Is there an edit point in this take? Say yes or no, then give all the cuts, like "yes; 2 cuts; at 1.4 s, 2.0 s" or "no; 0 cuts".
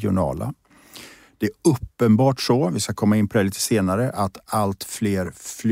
no; 0 cuts